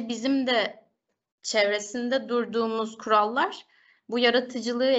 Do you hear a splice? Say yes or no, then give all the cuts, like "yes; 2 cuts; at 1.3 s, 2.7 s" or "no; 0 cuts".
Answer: no; 0 cuts